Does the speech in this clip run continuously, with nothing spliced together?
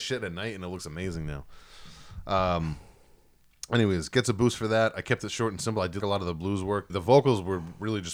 no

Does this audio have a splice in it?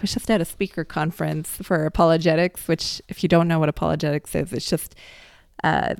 no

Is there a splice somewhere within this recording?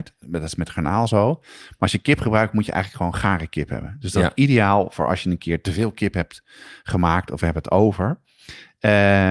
no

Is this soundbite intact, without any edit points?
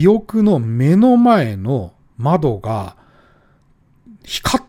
yes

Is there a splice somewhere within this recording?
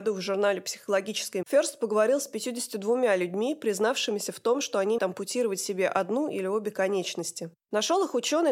yes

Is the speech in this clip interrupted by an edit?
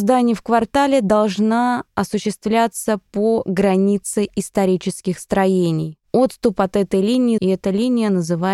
yes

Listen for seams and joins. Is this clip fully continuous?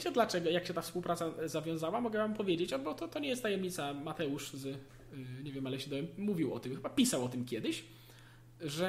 yes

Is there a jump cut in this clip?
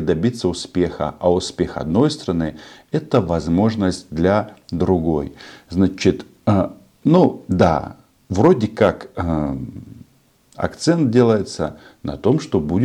no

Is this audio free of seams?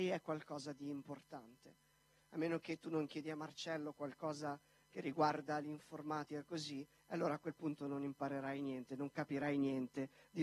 yes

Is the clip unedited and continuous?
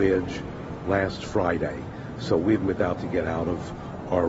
no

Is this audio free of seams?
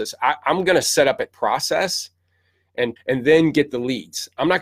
no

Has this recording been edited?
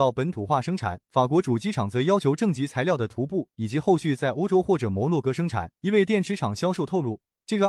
yes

